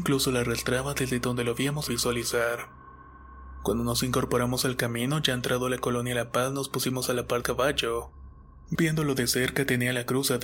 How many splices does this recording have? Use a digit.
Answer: 3